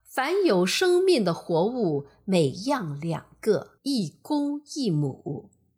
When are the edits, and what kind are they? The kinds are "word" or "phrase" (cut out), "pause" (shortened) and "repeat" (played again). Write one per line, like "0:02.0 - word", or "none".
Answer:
0:03.8 - pause